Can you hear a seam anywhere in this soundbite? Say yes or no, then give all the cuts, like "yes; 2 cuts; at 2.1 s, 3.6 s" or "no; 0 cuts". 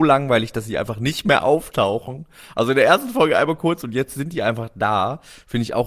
no; 0 cuts